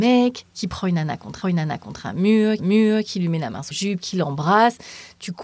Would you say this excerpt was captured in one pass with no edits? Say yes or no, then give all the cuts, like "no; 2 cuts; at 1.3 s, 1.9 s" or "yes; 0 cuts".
no; 3 cuts; at 1.4 s, 2.6 s, 3.7 s